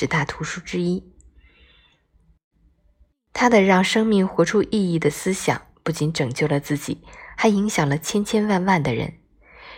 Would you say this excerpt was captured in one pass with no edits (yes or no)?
yes